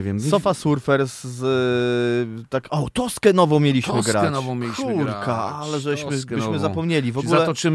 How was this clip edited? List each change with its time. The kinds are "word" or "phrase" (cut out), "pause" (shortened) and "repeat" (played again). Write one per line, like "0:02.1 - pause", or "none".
none